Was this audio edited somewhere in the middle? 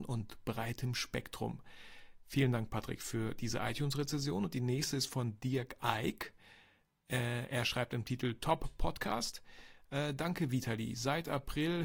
no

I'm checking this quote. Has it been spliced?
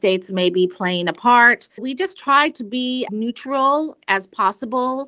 yes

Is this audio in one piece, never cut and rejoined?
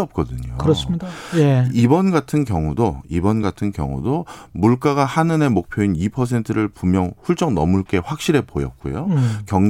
yes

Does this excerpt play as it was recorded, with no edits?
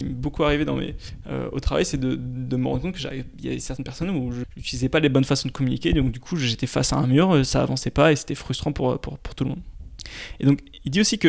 yes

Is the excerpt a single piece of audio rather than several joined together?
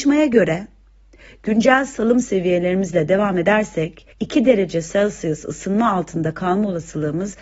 no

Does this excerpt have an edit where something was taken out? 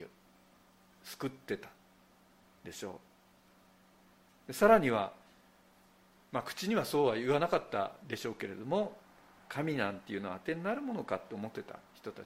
no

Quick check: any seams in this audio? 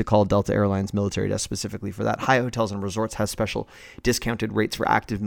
no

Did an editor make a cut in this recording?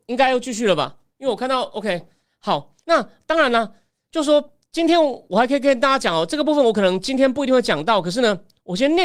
yes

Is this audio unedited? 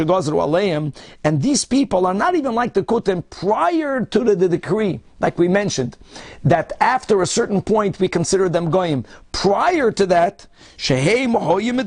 yes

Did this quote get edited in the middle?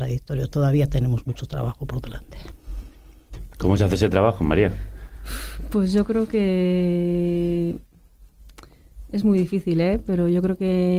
no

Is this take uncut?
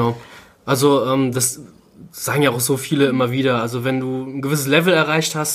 yes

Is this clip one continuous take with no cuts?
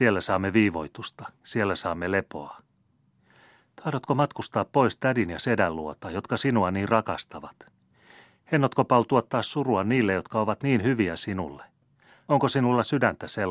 yes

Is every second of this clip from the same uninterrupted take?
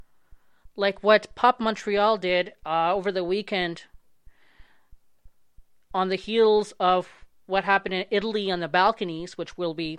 yes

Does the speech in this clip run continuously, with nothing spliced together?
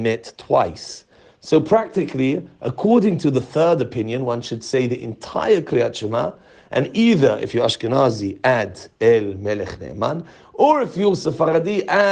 yes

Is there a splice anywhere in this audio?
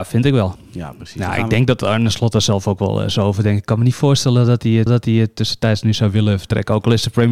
yes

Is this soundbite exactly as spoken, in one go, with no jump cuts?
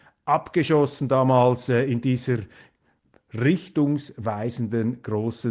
yes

